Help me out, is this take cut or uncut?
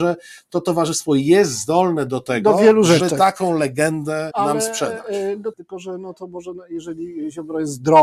cut